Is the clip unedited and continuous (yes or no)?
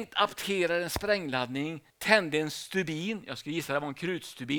no